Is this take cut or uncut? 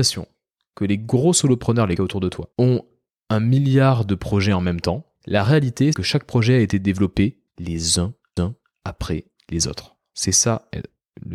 cut